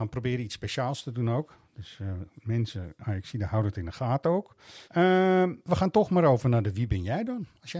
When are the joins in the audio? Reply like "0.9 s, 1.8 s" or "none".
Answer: 4.8 s